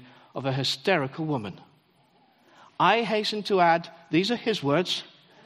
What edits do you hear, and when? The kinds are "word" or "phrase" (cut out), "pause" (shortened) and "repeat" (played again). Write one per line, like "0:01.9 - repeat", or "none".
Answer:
none